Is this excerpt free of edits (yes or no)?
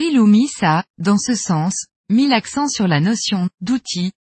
yes